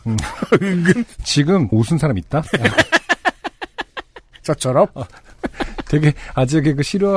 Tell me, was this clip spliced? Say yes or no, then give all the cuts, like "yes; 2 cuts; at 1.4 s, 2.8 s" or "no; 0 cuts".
yes; 1 cut; at 1.7 s